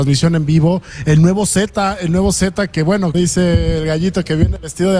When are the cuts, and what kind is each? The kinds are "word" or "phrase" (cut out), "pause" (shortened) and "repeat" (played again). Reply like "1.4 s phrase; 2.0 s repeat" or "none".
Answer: 3.1 s word